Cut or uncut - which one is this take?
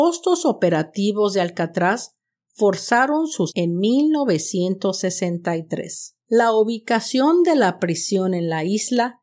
cut